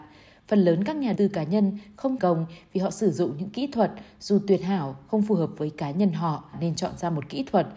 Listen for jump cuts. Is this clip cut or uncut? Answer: cut